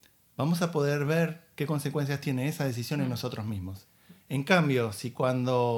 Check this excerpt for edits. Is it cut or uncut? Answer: uncut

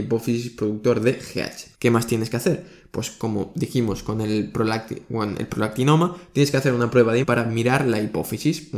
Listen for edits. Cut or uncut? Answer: cut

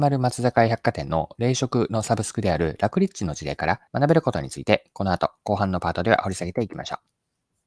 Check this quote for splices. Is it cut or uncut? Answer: cut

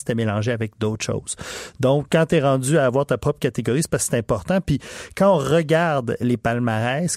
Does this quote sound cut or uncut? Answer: cut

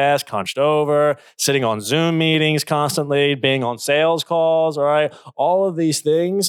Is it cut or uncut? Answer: uncut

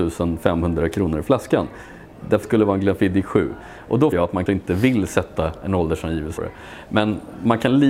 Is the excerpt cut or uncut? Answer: cut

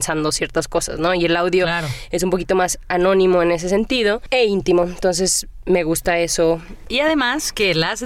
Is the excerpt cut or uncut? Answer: uncut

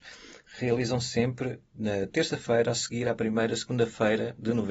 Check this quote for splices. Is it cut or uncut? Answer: uncut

